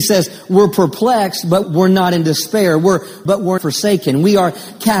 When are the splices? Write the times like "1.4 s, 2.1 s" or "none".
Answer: 1.6 s, 3.3 s, 3.6 s